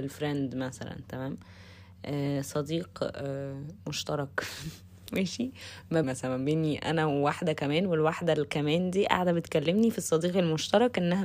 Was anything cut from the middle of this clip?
yes; 1 cut; at 6.0 s

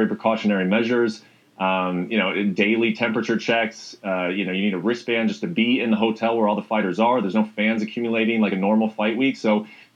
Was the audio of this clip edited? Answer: no; 0 cuts

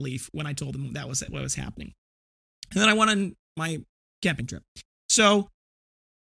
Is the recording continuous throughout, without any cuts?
yes; 0 cuts

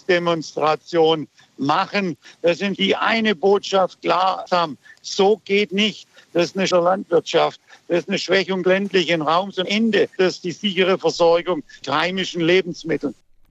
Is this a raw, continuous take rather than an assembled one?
no; 8 cuts; at 2.8 s, 4.5 s, 5.7 s, 6.7 s, 8.6 s, 9.6 s, 10.2 s, 11.8 s

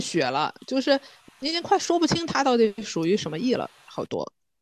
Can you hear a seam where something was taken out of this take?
no; 0 cuts

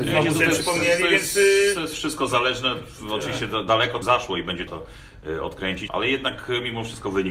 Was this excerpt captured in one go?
no; 3 cuts; at 4.0 s, 4.7 s, 5.9 s

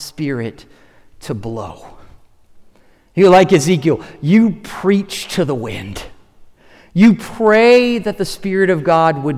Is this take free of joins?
yes; 0 cuts

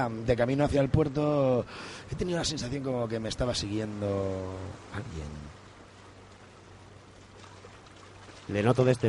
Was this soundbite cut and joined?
no; 0 cuts

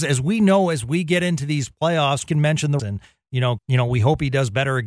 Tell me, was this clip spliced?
yes; 3 cuts; at 2.3 s, 2.8 s, 3.6 s

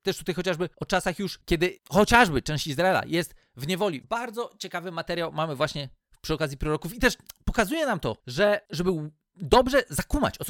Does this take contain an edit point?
yes; 1 cut; at 4.0 s

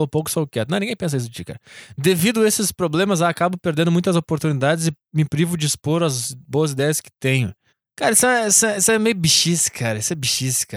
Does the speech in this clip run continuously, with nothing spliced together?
no; 1 cut; at 7.7 s

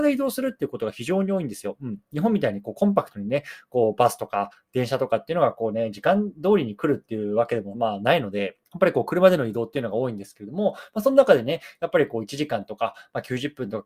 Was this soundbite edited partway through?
yes; 1 cut; at 8.7 s

